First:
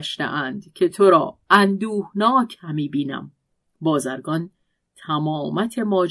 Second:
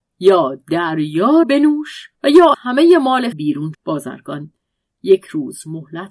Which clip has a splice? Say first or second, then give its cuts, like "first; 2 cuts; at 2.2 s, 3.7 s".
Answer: second; 5 cuts; at 1.4 s, 2.1 s, 2.5 s, 3.3 s, 3.7 s